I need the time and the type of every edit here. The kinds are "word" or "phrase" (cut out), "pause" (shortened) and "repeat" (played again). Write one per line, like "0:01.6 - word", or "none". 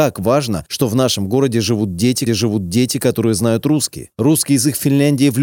0:02.3 - repeat